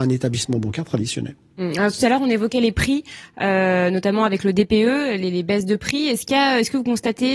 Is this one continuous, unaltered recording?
yes; 0 cuts

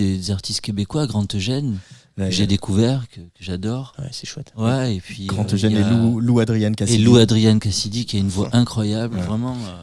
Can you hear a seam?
no; 0 cuts

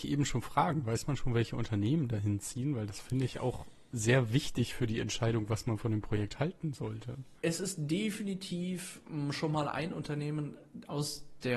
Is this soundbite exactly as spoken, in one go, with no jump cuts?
no; 1 cut; at 7.4 s

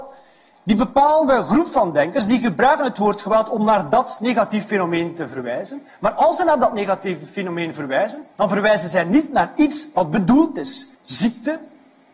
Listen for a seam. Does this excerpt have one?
yes; 2 cuts; at 8.3 s, 10.9 s

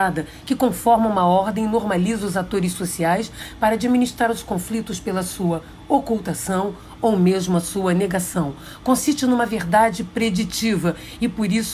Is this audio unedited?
yes; 0 cuts

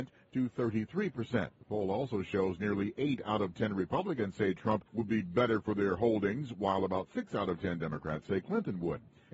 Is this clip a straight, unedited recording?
no; 2 cuts; at 1.5 s, 4.9 s

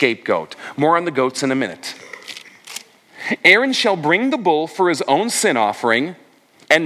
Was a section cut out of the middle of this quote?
no; 0 cuts

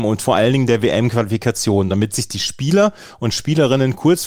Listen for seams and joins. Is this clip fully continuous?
yes; 0 cuts

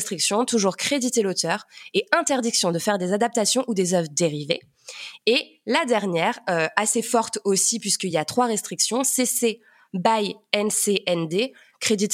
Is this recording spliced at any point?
no; 0 cuts

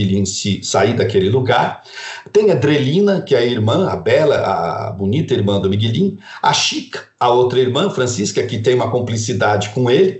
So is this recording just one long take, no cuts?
yes; 0 cuts

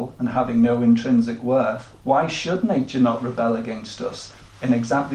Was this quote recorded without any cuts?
no; 1 cut; at 2.0 s

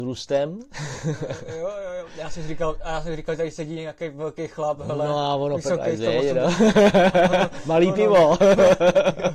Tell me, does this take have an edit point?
no; 0 cuts

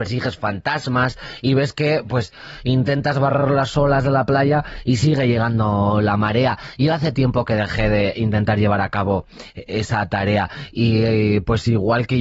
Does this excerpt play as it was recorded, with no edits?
yes; 0 cuts

